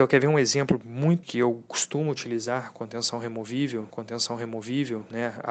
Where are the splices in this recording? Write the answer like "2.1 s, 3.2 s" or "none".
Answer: 1.2 s, 3.9 s